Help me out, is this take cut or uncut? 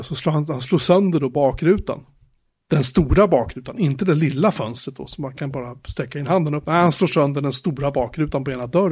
uncut